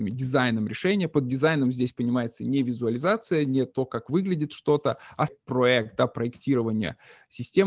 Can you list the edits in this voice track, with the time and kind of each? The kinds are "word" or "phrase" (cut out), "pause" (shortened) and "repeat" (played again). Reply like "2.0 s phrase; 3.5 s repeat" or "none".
5.3 s word